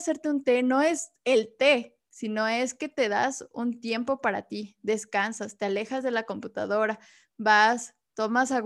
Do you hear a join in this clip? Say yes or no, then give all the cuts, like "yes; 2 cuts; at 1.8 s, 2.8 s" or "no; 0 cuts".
no; 0 cuts